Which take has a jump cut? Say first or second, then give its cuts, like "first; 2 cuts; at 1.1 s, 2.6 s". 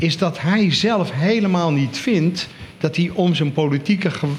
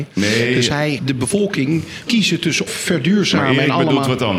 second; 3 cuts; at 1.0 s, 2.1 s, 2.7 s